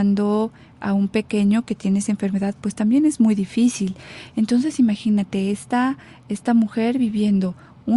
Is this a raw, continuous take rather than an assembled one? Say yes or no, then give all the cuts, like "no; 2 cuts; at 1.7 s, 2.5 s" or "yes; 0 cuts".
yes; 0 cuts